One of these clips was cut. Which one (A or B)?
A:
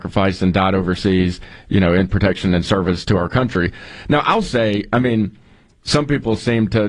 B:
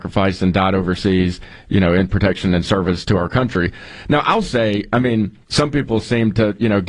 B